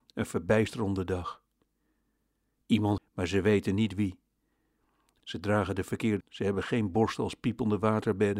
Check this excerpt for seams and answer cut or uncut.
cut